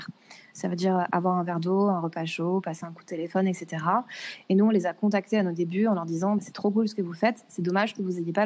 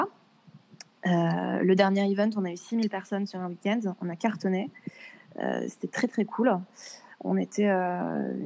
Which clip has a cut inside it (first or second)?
first